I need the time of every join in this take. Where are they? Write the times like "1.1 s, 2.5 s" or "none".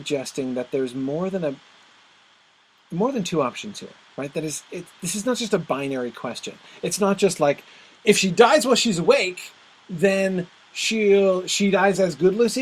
none